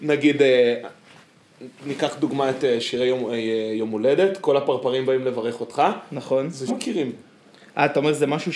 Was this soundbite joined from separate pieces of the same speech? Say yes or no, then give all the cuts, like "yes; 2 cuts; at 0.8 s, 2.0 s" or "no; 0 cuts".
yes; 2 cuts; at 2.8 s, 6.7 s